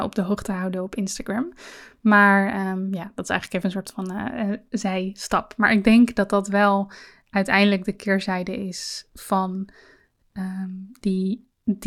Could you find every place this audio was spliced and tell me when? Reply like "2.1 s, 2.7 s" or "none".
none